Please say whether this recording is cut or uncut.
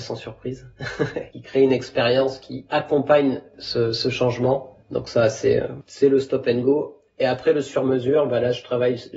cut